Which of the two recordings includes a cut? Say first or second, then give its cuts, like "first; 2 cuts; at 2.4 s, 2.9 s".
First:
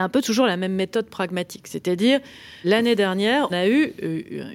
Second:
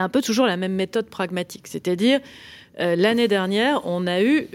first; 2 cuts; at 2.6 s, 3.5 s